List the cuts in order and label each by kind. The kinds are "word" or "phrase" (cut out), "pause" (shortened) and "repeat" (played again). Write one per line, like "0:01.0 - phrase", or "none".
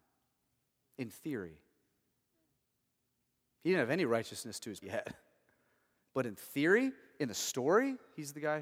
0:04.8 - word